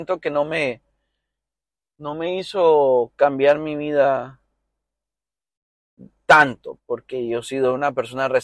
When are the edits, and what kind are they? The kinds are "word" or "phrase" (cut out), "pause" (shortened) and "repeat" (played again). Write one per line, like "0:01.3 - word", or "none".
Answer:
0:06.8 - word